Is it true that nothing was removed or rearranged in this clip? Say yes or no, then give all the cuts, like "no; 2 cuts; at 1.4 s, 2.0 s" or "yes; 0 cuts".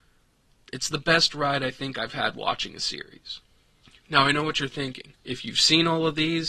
no; 2 cuts; at 3.8 s, 5.2 s